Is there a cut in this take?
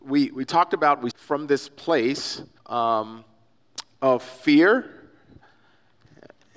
yes; 2 cuts; at 1.1 s, 2.6 s

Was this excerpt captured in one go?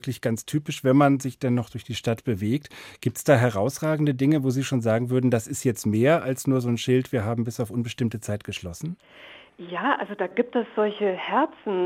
yes; 0 cuts

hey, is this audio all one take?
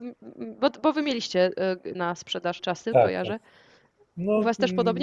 no; 2 cuts; at 1.9 s, 2.6 s

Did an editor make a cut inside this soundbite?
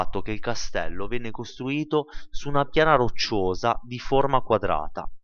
no; 0 cuts

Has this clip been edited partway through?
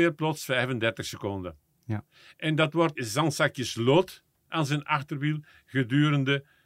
yes; 1 cut; at 3.0 s

